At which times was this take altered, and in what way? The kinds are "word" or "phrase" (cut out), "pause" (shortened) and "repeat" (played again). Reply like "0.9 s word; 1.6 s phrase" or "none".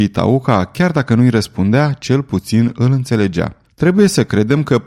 3.6 s pause